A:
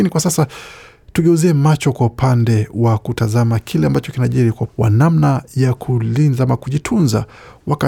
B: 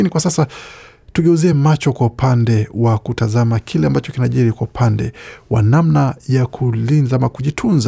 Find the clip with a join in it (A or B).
A